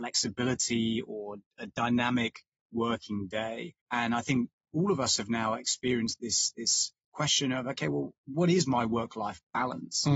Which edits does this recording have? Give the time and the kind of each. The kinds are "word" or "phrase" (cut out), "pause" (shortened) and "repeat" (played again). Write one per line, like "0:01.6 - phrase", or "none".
0:03.8 - pause
0:08.2 - pause